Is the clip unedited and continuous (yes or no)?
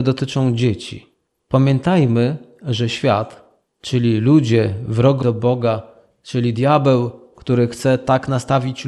no